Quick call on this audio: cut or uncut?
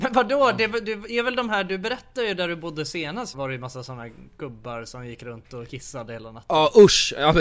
cut